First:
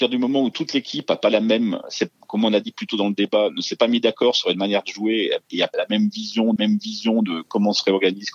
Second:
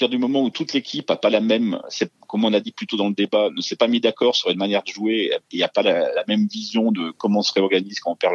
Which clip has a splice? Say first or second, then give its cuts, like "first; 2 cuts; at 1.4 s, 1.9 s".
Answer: first; 2 cuts; at 5.7 s, 6.6 s